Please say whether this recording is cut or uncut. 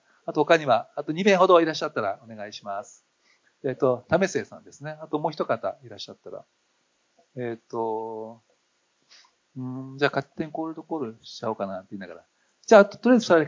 uncut